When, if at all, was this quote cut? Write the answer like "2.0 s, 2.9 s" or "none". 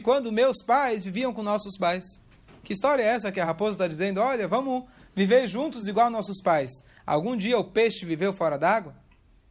none